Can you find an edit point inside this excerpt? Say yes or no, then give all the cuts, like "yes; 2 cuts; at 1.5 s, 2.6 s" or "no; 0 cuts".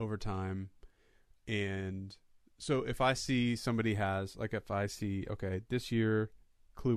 no; 0 cuts